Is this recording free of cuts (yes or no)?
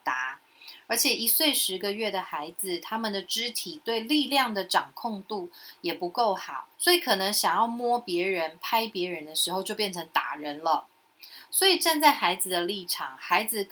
no